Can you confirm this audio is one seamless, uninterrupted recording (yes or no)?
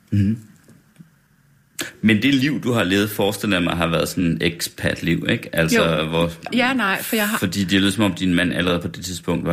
no